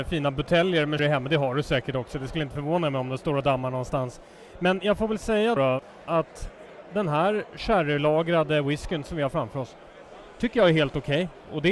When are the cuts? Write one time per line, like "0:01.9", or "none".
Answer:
0:01.0
0:05.6